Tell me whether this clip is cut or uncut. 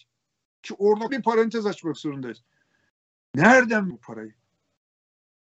cut